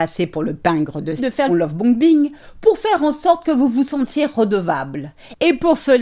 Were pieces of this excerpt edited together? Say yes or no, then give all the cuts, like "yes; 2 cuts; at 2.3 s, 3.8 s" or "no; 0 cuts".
yes; 2 cuts; at 1.2 s, 1.5 s